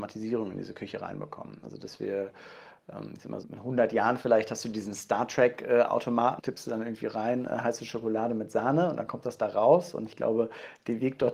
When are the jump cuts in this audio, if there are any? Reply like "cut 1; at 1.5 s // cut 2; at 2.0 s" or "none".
cut 1; at 3.4 s // cut 2; at 6.4 s

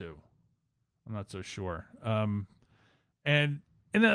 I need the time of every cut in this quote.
none

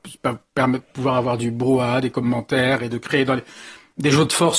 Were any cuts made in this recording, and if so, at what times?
none

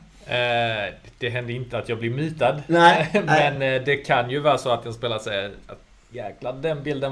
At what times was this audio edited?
none

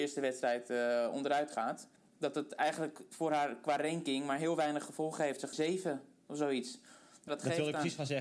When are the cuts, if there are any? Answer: cut 1; at 2.0 s // cut 2; at 5.5 s // cut 3; at 7.3 s

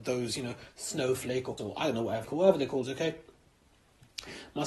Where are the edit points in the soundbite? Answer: cut 1; at 1.6 s // cut 2; at 2.2 s // cut 3; at 2.8 s

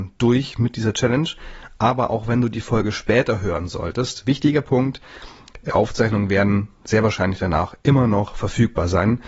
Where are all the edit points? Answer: cut 1; at 5.7 s

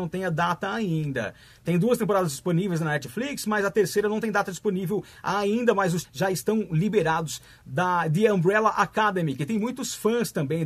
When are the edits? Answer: cut 1; at 6.0 s

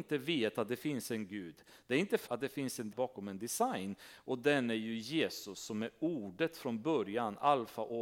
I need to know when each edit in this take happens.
cut 1; at 2.3 s // cut 2; at 2.9 s

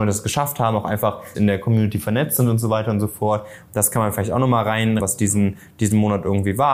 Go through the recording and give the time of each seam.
cut 1; at 1.3 s // cut 2; at 5.0 s

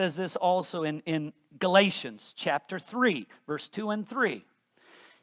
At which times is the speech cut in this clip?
none

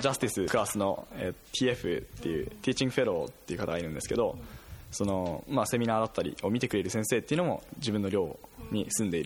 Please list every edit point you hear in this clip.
cut 1; at 1.4 s

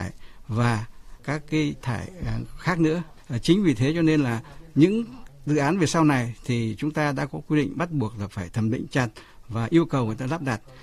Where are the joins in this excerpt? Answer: cut 1; at 1.8 s

